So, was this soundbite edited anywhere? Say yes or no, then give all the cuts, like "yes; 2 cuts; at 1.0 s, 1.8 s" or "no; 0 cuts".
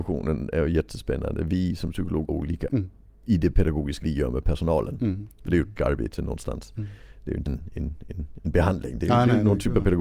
yes; 5 cuts; at 2.3 s, 2.7 s, 4.0 s, 5.8 s, 7.5 s